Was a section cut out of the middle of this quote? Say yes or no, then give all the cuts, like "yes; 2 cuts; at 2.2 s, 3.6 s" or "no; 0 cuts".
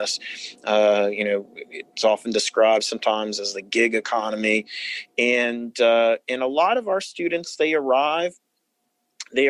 no; 0 cuts